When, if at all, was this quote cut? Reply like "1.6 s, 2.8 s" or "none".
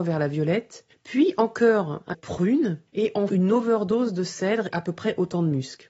0.9 s, 2.1 s, 2.9 s, 3.3 s, 4.7 s